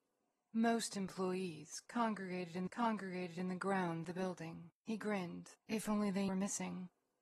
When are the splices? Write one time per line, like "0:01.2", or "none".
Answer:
0:02.7
0:04.0
0:04.7
0:05.6
0:06.3

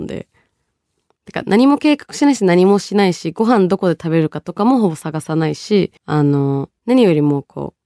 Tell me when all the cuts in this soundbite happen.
0:06.0
0:06.8

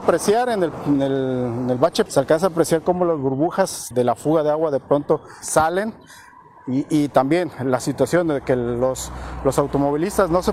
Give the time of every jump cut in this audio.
0:02.1
0:03.9
0:05.4

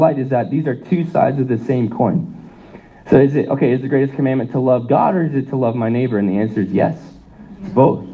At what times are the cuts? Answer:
none

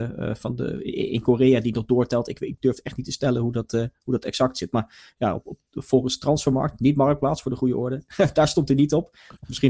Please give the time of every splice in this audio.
none

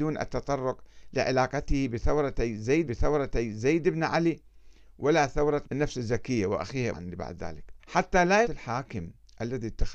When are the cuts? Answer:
0:02.9
0:05.6
0:06.9
0:07.8
0:08.4

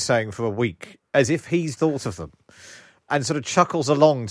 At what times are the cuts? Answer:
0:01.8
0:03.1

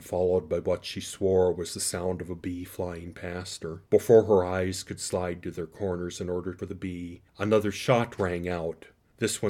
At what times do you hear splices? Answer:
0:03.9
0:06.6
0:07.3

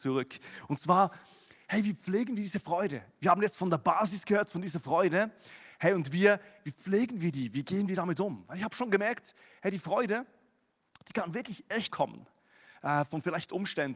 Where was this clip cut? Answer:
0:11.9

